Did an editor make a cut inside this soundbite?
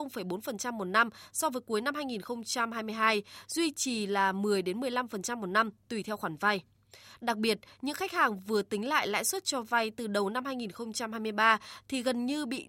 no; 0 cuts

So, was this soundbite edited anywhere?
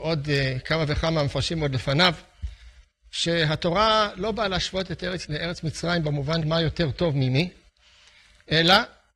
yes; 2 cuts; at 5.2 s, 6.4 s

